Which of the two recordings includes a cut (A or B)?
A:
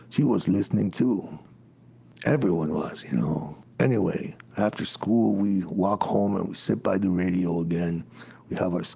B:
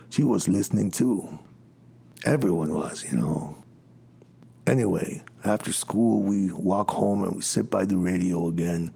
A